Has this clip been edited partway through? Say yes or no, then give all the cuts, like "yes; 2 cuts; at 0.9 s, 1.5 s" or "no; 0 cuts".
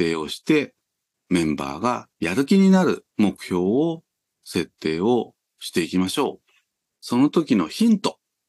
yes; 2 cuts; at 2.1 s, 3.1 s